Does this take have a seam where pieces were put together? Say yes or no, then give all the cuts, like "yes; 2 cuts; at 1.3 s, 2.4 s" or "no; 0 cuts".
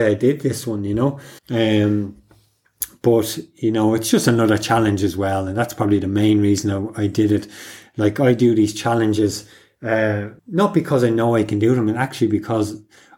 yes; 2 cuts; at 1.4 s, 10.4 s